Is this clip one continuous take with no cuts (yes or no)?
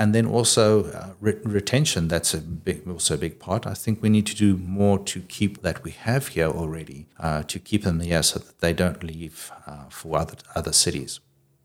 no